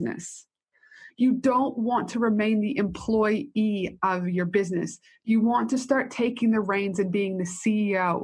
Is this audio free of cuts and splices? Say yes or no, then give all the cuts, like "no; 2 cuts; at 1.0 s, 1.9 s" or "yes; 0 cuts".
yes; 0 cuts